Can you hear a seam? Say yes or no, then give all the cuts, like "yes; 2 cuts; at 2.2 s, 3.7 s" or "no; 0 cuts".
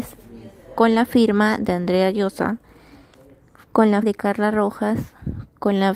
yes; 1 cut; at 4.0 s